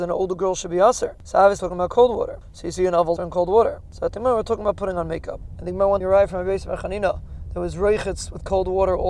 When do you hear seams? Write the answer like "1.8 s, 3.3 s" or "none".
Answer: 1.6 s, 3.2 s, 6.0 s